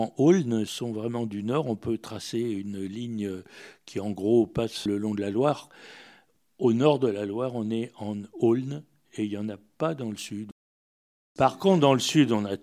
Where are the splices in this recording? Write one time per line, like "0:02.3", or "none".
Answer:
none